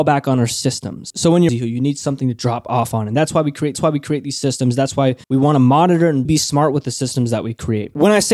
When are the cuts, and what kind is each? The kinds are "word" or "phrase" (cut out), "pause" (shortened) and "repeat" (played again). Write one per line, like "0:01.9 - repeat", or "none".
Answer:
0:01.5 - phrase
0:03.7 - repeat
0:05.2 - pause
0:06.3 - word